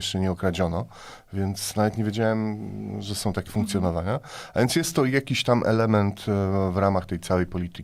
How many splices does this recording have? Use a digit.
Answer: 1